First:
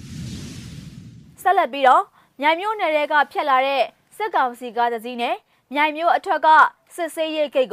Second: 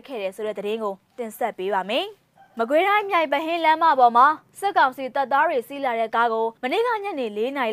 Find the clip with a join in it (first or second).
second